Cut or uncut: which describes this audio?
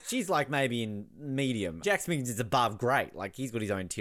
cut